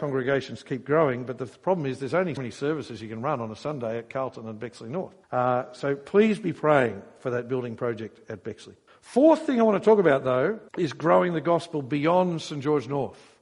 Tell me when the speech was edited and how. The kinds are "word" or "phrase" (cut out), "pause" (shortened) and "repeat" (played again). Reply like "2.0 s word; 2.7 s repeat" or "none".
2.4 s word; 5.2 s pause; 8.9 s pause; 10.7 s pause

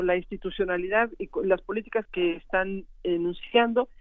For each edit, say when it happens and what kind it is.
2.0 s word

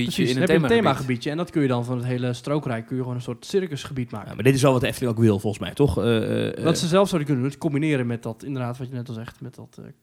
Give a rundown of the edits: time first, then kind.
none

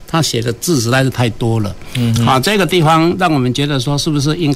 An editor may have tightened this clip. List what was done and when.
none

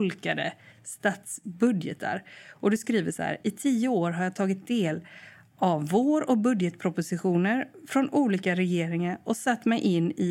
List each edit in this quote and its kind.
none

